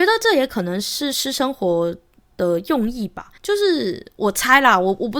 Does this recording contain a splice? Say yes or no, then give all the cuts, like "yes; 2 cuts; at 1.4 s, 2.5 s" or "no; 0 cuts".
yes; 1 cut; at 3.4 s